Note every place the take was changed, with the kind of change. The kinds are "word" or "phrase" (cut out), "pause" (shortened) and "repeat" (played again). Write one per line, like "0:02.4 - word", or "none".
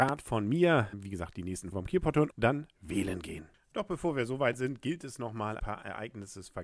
0:00.9 - word
0:01.7 - word
0:02.3 - word
0:02.7 - word
0:05.6 - word

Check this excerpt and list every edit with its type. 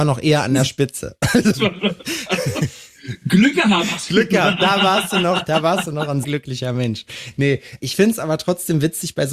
0:01.5 - word
0:06.2 - word
0:07.8 - word

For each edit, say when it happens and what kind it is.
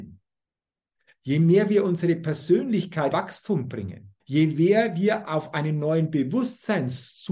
0:03.1 - phrase
0:04.2 - pause

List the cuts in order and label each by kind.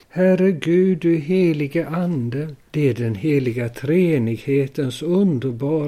0:02.6 - pause

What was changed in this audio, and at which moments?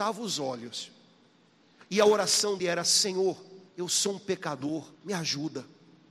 0:02.6 - word
0:03.7 - pause
0:04.9 - pause

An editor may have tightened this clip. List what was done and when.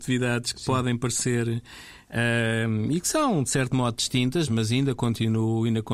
0:04.5 - word

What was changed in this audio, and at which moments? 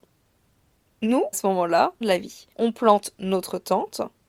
0:01.3 - word
0:02.0 - phrase
0:02.5 - pause

